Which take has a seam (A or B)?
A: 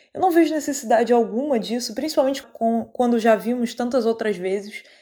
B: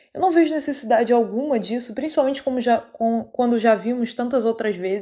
A